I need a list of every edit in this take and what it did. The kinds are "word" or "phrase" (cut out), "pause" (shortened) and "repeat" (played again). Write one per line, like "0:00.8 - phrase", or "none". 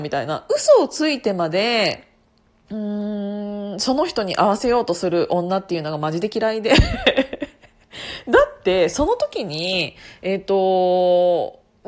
none